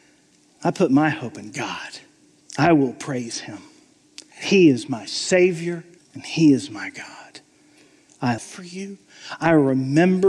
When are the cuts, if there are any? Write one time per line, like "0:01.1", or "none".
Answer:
0:02.4
0:04.3
0:06.0
0:08.4